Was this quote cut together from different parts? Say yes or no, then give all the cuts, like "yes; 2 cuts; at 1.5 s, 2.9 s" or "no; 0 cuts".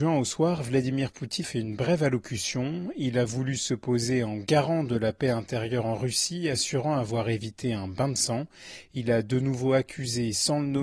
yes; 1 cut; at 1.4 s